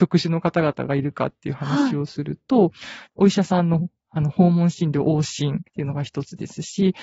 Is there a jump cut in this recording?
yes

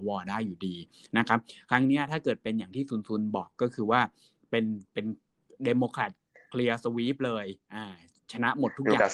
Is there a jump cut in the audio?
no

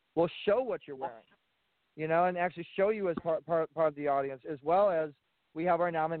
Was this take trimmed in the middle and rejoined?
no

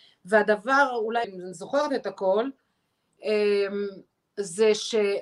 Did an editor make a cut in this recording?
yes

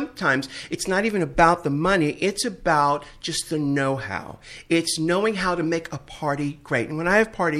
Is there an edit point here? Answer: no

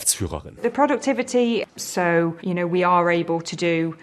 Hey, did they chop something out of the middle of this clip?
yes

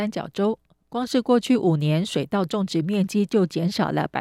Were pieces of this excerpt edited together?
no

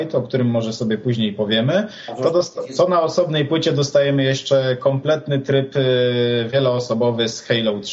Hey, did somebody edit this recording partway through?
no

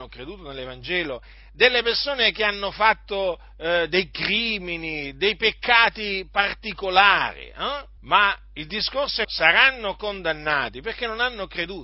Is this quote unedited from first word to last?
no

